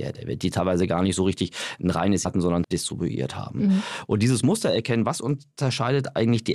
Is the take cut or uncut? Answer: cut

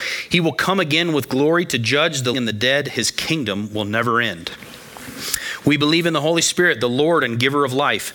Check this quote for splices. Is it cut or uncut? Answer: cut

